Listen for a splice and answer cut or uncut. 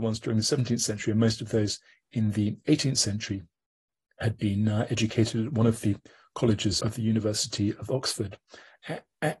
cut